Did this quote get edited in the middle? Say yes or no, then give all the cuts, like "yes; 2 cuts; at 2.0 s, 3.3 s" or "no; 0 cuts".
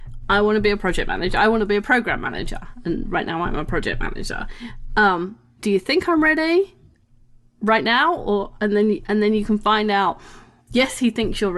no; 0 cuts